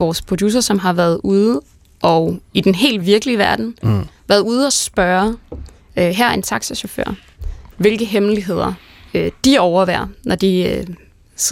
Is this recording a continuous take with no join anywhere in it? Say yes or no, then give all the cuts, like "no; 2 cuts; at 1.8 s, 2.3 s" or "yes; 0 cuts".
no; 1 cut; at 3.0 s